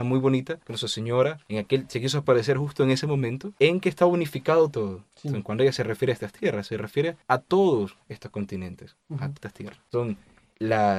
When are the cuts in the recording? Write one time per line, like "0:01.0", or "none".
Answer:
0:09.4